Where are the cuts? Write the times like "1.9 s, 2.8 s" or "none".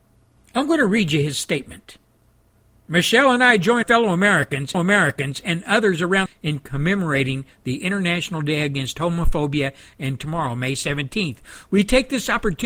2.4 s, 3.8 s, 4.7 s, 6.3 s, 10.2 s